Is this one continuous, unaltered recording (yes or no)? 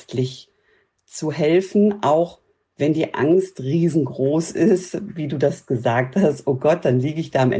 yes